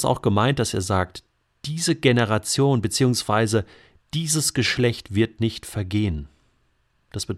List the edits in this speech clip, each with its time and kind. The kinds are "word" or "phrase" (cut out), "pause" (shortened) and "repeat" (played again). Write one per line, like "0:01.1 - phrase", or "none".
none